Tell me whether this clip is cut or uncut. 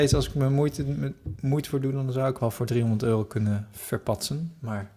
cut